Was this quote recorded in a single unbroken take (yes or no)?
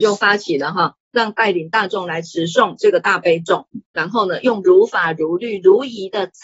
no